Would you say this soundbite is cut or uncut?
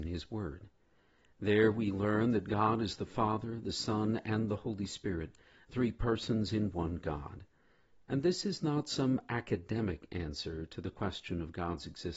uncut